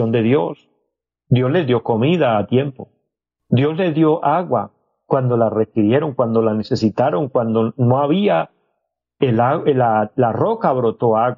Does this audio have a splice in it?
no; 0 cuts

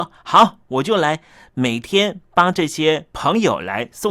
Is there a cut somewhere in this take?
no; 0 cuts

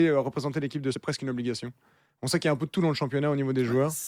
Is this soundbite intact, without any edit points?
no; 1 cut; at 0.9 s

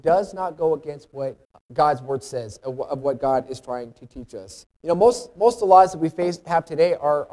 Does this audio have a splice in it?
yes; 2 cuts; at 1.4 s, 4.7 s

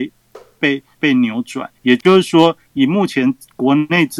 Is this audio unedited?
no; 2 cuts; at 0.9 s, 1.7 s

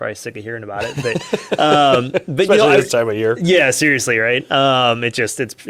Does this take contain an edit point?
no; 0 cuts

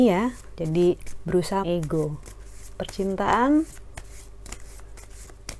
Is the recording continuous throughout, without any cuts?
no; 1 cut; at 1.6 s

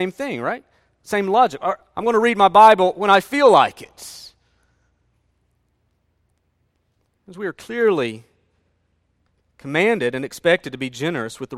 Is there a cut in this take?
no; 0 cuts

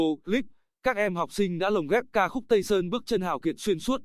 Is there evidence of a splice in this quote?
no; 0 cuts

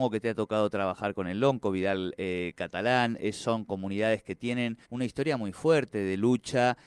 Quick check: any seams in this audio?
yes; 1 cut; at 4.8 s

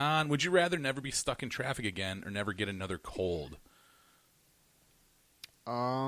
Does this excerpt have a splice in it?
no; 0 cuts

